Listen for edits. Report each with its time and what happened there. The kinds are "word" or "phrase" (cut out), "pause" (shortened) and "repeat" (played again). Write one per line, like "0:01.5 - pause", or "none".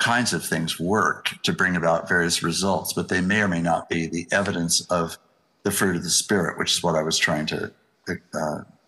none